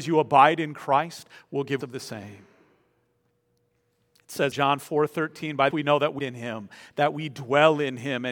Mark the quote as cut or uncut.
cut